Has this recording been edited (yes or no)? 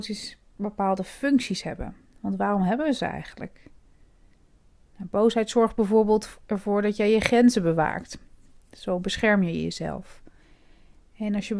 no